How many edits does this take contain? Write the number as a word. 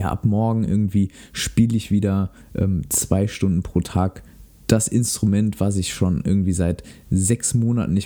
zero